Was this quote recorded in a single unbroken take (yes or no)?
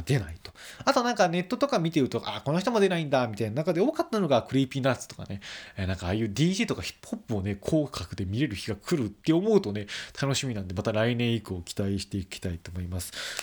yes